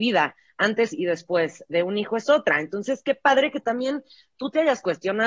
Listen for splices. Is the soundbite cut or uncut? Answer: uncut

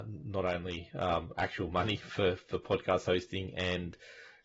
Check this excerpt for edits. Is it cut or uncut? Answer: uncut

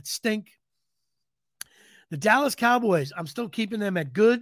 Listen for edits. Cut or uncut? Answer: uncut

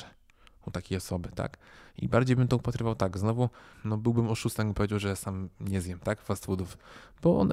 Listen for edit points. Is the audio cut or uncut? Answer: uncut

